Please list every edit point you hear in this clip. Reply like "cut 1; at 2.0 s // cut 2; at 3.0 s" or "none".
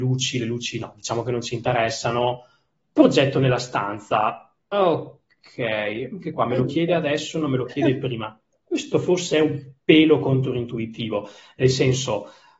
none